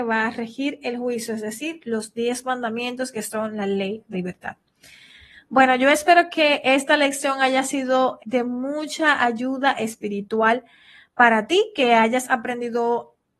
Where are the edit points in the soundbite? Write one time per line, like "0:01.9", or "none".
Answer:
0:04.1
0:08.2